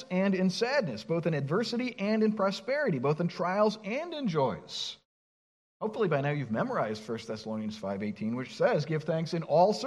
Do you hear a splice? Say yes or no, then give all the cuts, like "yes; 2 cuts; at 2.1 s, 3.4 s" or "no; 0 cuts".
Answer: no; 0 cuts